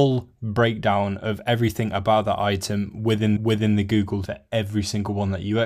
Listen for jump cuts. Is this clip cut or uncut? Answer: cut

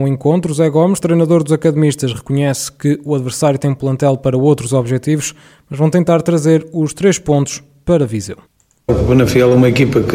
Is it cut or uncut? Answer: uncut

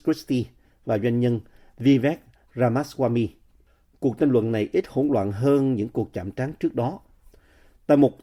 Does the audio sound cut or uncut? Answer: uncut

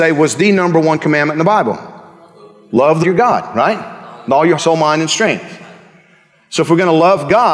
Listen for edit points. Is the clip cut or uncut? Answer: cut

